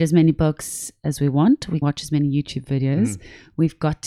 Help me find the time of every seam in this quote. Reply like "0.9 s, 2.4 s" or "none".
1.8 s